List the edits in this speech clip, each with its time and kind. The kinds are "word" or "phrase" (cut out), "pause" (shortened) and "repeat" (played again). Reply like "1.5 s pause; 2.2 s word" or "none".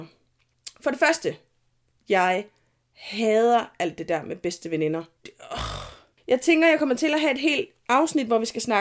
none